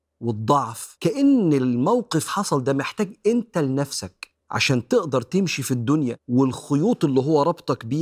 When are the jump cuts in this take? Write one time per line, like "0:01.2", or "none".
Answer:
0:01.0
0:02.3
0:04.4
0:06.2